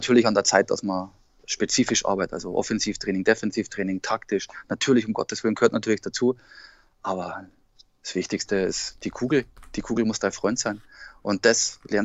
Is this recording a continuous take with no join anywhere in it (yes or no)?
yes